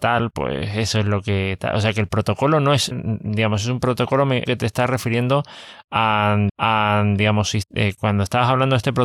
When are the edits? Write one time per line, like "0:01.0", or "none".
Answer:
0:02.9
0:04.5
0:06.5

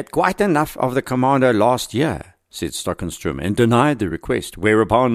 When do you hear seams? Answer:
none

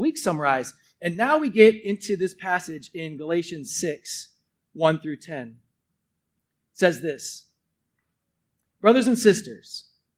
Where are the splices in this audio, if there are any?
none

